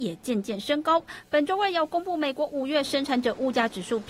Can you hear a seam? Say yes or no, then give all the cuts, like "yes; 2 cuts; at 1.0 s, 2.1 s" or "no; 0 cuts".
no; 0 cuts